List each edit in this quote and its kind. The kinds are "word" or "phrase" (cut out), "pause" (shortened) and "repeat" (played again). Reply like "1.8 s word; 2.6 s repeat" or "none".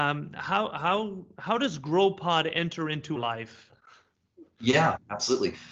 3.2 s word